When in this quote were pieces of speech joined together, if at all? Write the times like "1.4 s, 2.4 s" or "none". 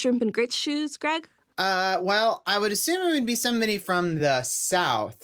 none